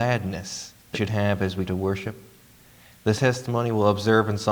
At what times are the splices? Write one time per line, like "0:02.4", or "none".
0:00.9
0:01.7
0:03.2